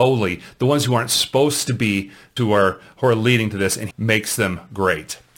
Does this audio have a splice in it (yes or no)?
yes